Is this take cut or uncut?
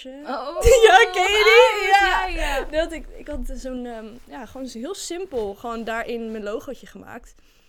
uncut